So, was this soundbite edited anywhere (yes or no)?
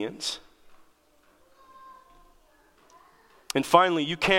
no